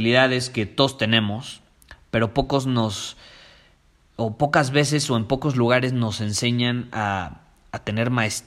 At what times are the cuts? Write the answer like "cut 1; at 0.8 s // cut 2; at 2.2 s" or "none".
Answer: none